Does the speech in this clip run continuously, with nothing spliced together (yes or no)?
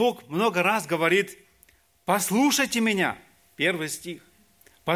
yes